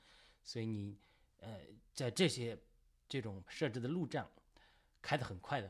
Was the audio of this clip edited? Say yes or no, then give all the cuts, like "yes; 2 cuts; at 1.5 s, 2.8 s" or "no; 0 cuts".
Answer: yes; 2 cuts; at 1.9 s, 3.5 s